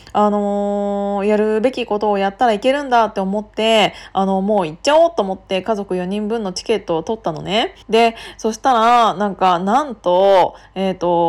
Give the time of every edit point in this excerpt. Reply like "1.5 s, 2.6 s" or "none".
7.8 s